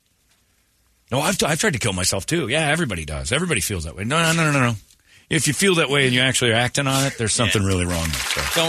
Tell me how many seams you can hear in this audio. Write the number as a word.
zero